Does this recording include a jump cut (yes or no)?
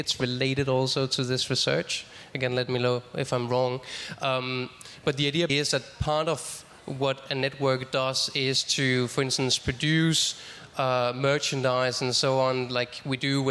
yes